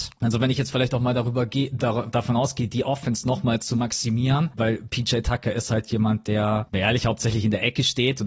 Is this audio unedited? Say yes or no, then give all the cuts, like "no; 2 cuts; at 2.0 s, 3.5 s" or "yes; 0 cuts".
yes; 0 cuts